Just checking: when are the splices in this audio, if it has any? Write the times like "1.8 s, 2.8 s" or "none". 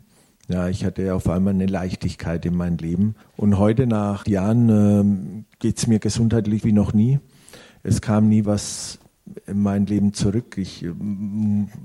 3.2 s, 4.2 s, 6.6 s, 8.4 s